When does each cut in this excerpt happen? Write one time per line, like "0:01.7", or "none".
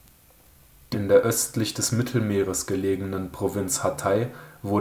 0:00.9